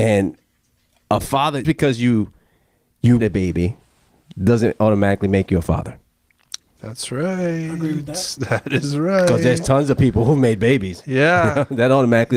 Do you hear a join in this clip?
yes; 2 cuts; at 1.6 s, 3.2 s

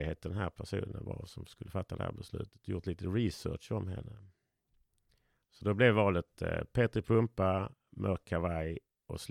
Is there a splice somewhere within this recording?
no; 0 cuts

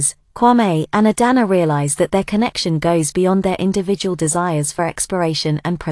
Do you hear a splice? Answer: no; 0 cuts

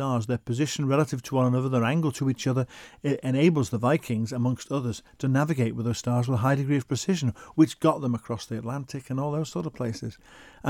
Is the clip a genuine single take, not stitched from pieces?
yes; 0 cuts

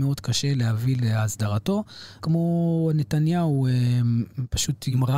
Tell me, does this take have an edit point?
yes; 1 cut; at 2.2 s

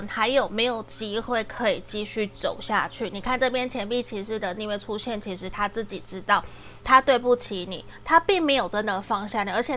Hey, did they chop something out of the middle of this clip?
no; 0 cuts

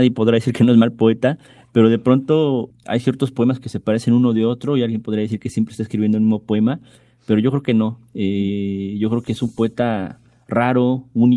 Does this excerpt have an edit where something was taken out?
no; 0 cuts

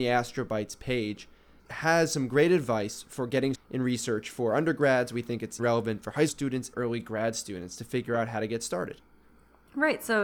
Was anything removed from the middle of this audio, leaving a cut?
yes; 5 cuts; at 1.6 s, 3.5 s, 5.6 s, 6.3 s, 6.7 s

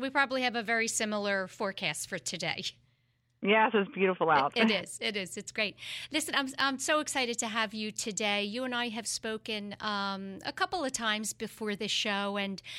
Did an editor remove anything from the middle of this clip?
no; 0 cuts

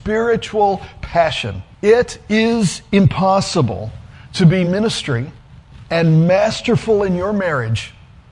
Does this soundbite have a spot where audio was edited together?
yes; 2 cuts; at 1.7 s, 4.6 s

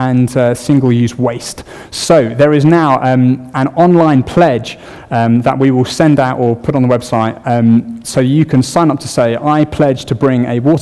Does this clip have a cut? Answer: no; 0 cuts

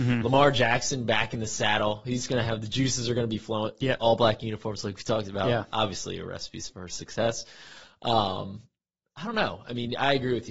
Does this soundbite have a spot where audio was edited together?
no; 0 cuts

